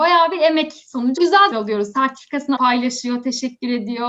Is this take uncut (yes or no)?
no